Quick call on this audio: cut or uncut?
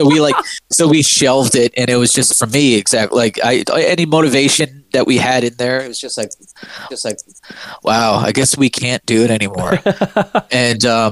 cut